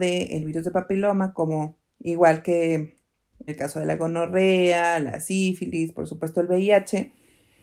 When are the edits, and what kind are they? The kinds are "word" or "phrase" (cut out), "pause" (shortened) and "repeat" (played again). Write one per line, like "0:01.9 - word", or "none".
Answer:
0:03.5 - word

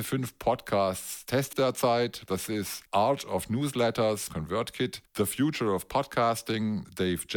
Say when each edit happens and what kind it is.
0:01.5 - word
0:04.3 - phrase

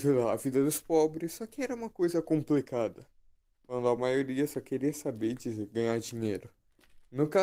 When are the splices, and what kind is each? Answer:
none

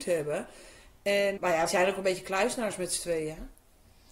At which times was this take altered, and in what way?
0:01.4 - word
0:01.7 - word

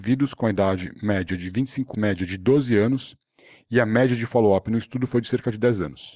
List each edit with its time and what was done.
0:01.9 - phrase

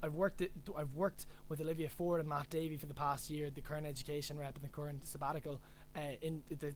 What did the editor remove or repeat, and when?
none

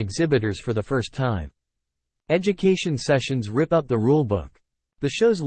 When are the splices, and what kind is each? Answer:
none

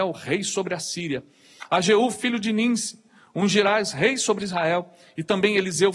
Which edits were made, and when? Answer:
none

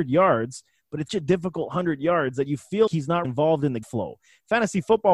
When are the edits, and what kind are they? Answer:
0:01.1 - word
0:02.9 - word
0:03.2 - word
0:03.8 - word

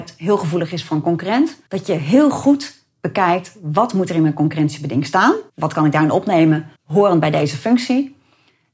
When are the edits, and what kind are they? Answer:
0:01.7 - pause
0:05.5 - pause
0:06.8 - pause

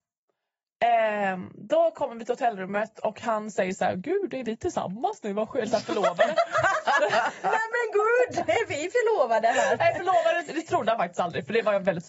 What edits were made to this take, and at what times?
none

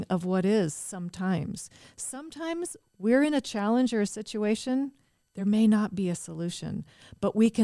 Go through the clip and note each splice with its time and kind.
none

